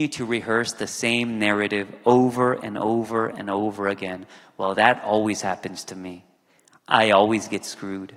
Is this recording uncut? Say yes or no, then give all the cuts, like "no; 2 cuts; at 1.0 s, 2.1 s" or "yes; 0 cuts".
yes; 0 cuts